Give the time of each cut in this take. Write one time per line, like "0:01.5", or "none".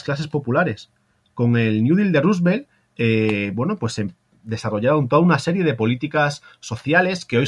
none